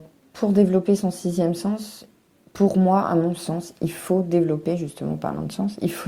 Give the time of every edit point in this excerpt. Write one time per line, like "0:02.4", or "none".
none